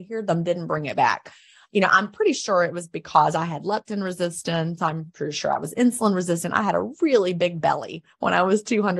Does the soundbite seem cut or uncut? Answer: uncut